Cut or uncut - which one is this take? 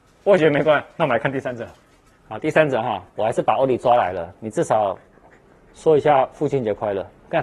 uncut